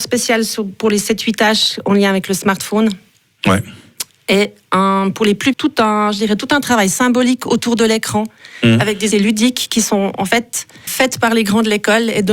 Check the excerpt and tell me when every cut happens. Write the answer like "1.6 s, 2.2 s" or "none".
5.5 s, 9.1 s, 10.9 s